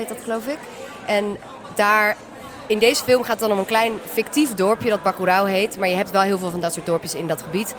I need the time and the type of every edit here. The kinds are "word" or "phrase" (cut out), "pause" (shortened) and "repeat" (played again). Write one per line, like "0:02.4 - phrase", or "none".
none